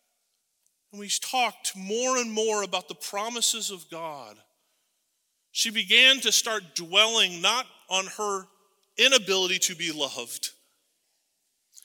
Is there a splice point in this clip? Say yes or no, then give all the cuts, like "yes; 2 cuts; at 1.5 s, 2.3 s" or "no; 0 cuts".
no; 0 cuts